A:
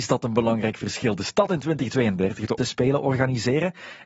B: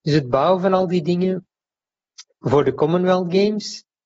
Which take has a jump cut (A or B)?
A